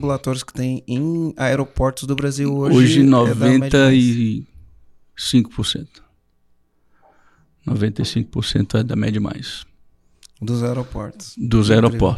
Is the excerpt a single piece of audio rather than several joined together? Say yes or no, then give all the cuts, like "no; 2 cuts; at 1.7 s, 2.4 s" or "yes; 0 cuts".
yes; 0 cuts